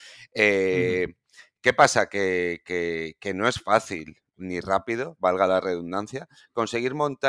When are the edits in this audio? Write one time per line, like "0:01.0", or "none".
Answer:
none